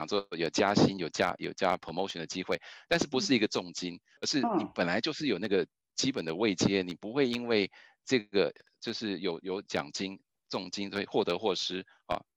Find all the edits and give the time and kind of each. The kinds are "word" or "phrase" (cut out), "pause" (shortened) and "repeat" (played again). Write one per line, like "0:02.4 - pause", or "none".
none